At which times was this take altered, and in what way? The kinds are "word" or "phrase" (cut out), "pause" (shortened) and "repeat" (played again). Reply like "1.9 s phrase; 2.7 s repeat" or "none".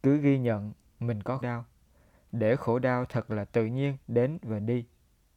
1.4 s word; 4.0 s pause